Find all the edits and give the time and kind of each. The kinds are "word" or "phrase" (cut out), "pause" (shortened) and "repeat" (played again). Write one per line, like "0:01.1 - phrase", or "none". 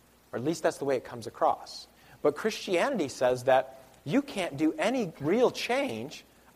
0:02.0 - pause